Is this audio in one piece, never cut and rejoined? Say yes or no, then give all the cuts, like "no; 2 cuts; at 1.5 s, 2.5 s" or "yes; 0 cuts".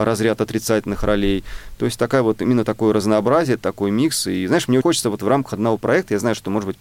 no; 1 cut; at 4.8 s